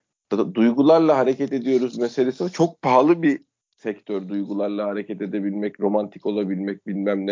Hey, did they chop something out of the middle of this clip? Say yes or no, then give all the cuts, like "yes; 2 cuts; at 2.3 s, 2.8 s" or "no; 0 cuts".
no; 0 cuts